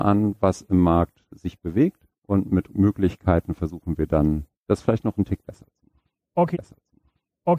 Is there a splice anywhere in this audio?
yes; 4 cuts; at 2.2 s, 2.7 s, 4.5 s, 6.5 s

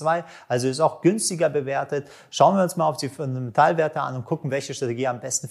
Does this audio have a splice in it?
no; 0 cuts

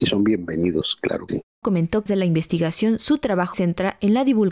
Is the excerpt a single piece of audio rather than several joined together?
no; 4 cuts; at 1.3 s, 1.6 s, 2.1 s, 3.5 s

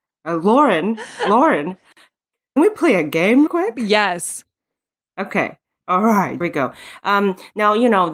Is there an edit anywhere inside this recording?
yes; 3 cuts; at 2.6 s, 3.5 s, 6.4 s

